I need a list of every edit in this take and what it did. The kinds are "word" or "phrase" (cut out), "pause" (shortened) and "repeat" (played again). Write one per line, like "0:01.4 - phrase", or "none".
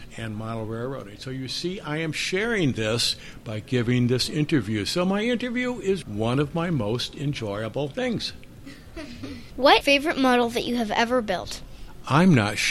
0:06.0 - word
0:09.8 - phrase

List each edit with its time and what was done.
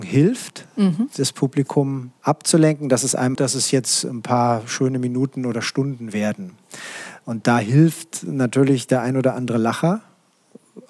0:02.2 - pause
0:03.3 - word

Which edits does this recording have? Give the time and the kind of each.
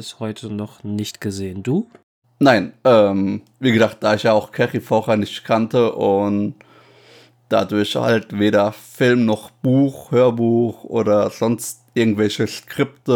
none

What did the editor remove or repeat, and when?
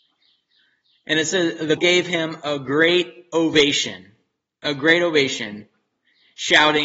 0:01.8 - word

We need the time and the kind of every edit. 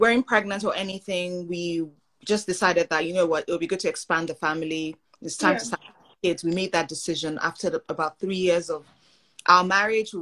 none

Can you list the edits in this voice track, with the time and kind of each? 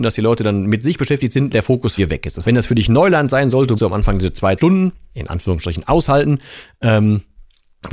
0:01.5 - word
0:02.0 - word
0:02.4 - word
0:03.8 - word
0:04.6 - word

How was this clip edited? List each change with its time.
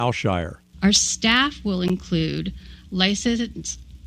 none

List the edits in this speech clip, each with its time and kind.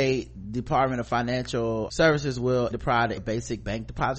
0:01.9 - word
0:02.7 - word
0:03.2 - word

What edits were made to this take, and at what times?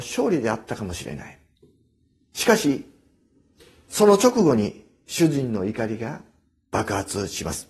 none

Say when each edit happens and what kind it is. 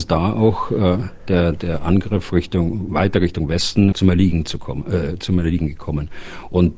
0:03.9 - phrase

